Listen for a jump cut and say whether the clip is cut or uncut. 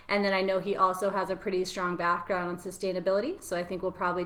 uncut